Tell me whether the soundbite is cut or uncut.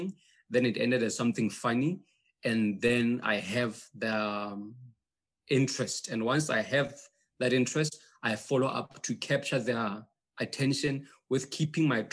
uncut